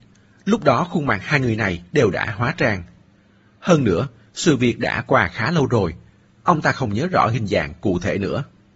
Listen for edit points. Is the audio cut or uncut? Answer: uncut